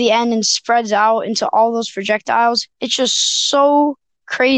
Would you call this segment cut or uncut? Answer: cut